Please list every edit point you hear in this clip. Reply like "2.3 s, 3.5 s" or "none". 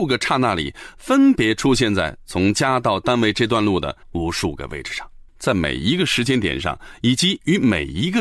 4.0 s, 5.3 s